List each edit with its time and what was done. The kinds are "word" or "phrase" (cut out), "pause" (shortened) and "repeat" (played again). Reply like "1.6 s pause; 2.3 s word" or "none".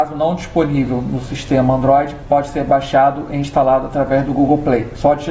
none